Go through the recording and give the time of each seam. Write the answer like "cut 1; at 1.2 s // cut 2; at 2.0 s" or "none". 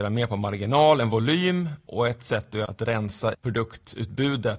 cut 1; at 2.7 s // cut 2; at 3.3 s